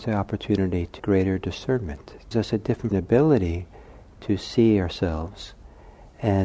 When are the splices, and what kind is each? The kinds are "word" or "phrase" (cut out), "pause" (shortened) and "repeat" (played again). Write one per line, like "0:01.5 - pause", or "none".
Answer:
0:01.0 - word
0:02.3 - word
0:02.9 - phrase